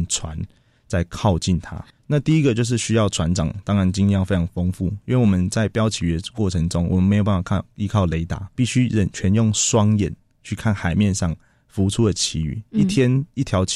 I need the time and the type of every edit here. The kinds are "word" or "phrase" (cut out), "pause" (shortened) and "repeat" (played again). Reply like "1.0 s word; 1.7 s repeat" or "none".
8.5 s word